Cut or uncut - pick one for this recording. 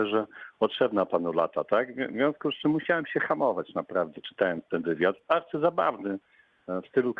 uncut